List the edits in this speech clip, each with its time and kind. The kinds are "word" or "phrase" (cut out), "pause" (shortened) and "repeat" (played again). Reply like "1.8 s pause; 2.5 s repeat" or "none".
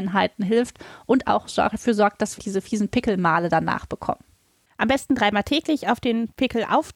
2.4 s word

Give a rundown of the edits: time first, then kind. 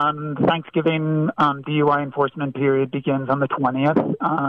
none

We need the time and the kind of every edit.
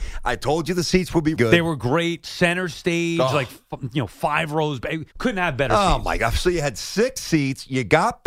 1.4 s word; 5.1 s pause

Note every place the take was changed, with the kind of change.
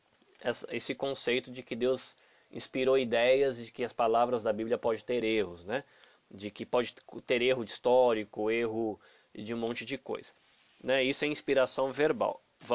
none

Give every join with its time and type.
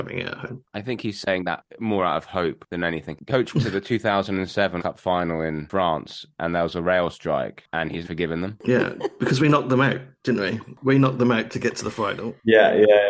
3.5 s word; 4.8 s word; 8.0 s word

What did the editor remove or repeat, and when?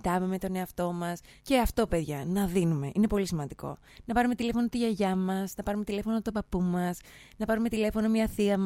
none

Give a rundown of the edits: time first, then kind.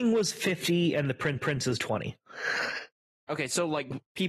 1.4 s repeat

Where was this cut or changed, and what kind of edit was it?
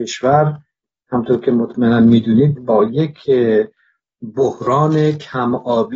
none

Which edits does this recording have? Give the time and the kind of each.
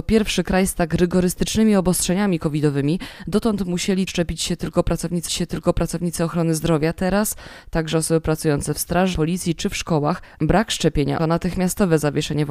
4.1 s word; 5.3 s repeat; 9.1 s word; 11.2 s word

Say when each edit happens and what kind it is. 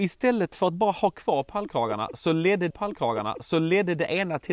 2.7 s repeat

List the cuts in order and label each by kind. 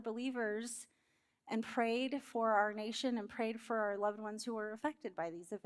none

